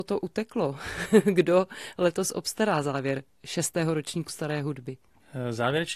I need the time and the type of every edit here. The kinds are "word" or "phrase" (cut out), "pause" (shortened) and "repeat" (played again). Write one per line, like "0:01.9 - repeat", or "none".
0:04.3 - word